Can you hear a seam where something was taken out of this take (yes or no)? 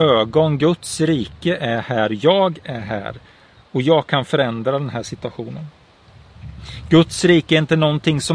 no